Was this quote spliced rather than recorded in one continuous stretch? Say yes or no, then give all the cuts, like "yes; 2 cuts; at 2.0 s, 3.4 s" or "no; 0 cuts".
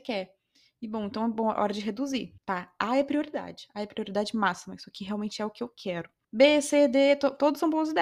yes; 2 cuts; at 2.4 s, 6.2 s